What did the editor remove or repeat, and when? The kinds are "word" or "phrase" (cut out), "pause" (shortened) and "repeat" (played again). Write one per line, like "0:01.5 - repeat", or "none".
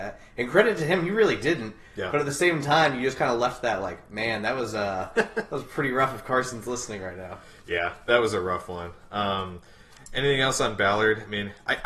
none